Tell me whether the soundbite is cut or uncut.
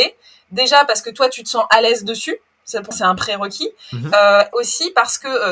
cut